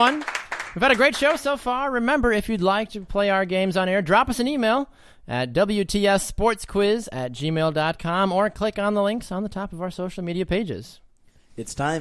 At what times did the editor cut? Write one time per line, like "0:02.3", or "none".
none